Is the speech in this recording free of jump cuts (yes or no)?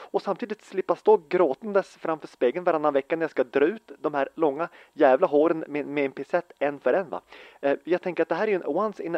yes